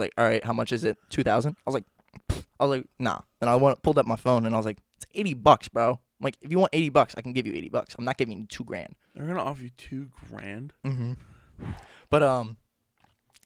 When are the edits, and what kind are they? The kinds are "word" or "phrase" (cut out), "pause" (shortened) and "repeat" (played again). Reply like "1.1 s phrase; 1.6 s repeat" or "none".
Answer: 2.5 s pause; 6.1 s pause; 9.0 s pause